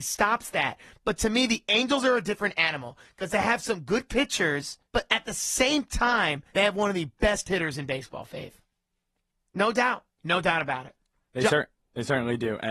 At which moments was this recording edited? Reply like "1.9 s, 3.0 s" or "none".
4.8 s, 6.5 s, 10.2 s